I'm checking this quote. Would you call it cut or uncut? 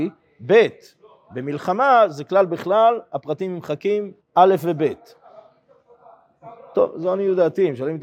cut